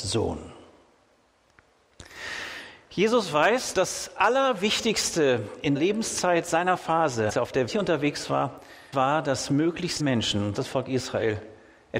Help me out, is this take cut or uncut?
cut